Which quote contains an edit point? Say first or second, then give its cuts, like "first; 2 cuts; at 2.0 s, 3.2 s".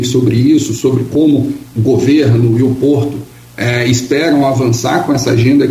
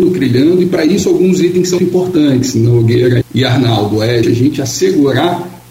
second; 3 cuts; at 1.8 s, 3.2 s, 4.2 s